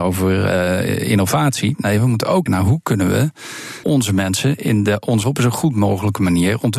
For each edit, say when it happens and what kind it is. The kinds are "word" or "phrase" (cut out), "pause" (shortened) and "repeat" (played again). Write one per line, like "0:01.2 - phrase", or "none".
0:02.5 - word
0:03.8 - word
0:05.2 - word